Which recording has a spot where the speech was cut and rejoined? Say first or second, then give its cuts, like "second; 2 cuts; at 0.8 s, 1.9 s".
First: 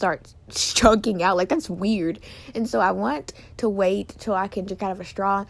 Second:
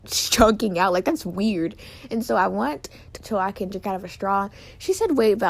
second; 1 cut; at 3.2 s